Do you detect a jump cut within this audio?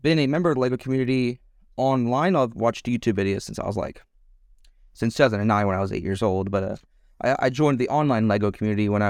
no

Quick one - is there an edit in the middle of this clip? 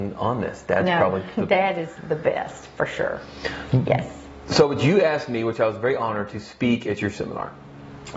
no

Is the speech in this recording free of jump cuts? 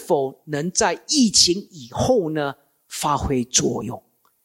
yes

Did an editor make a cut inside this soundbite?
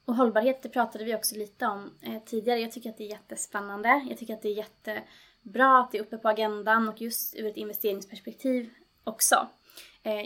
no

